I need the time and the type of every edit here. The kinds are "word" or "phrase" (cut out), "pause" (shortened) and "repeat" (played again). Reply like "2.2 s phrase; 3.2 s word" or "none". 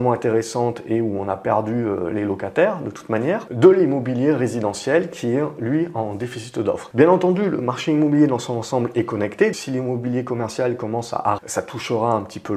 9.5 s word; 11.4 s word

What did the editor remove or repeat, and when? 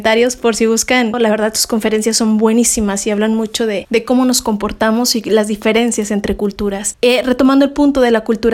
none

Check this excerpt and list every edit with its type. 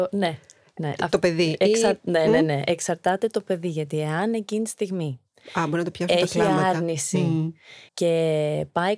7.9 s pause

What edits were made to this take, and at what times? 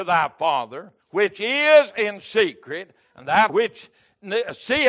1.0 s pause; 3.5 s word

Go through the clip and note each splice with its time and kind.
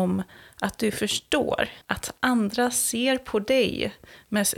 1.8 s pause

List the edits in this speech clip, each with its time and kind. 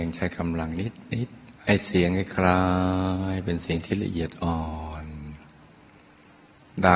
1.6 s pause

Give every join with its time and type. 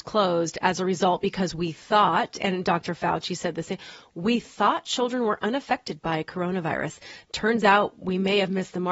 none

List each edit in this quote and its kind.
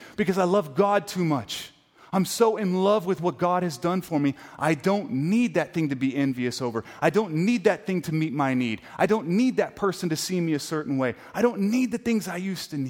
none

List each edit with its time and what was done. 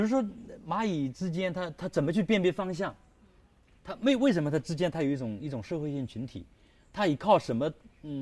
none

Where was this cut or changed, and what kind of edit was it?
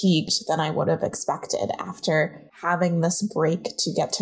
2.5 s pause

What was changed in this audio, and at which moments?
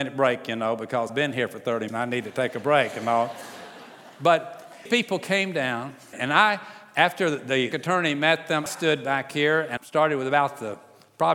1.1 s word; 1.9 s word; 4.9 s word; 6.1 s word; 7.7 s word; 8.7 s word; 9.8 s word

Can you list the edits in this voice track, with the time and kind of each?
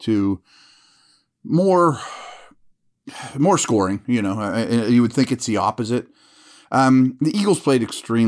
none

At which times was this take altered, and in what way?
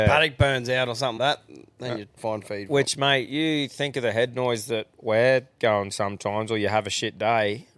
1.2 s word; 2.2 s phrase; 5.9 s word

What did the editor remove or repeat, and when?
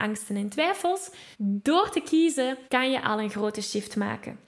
1.3 s pause; 2.7 s pause

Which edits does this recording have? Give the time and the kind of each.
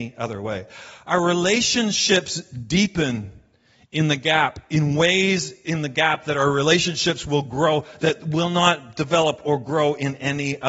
none

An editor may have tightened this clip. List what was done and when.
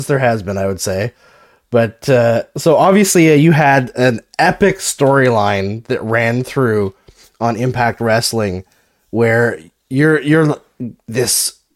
none

